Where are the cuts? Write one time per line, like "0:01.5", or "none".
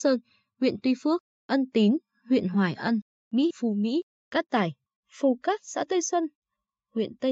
0:03.5
0:04.9